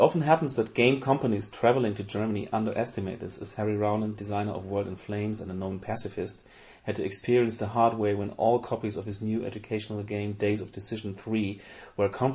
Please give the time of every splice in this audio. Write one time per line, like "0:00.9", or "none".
none